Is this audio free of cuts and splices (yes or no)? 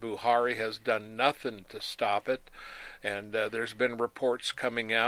yes